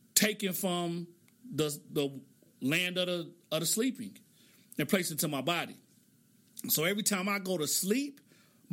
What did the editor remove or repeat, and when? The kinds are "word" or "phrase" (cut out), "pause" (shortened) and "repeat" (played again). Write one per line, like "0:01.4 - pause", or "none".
none